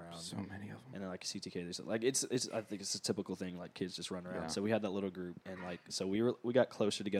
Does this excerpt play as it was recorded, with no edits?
yes; 0 cuts

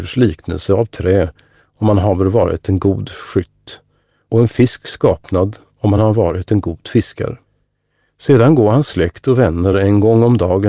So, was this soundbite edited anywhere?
no; 0 cuts

